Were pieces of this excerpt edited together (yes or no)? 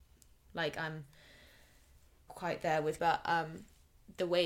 yes